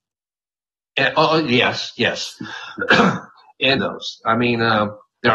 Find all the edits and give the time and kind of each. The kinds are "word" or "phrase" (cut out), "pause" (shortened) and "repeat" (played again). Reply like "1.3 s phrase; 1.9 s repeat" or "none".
3.8 s phrase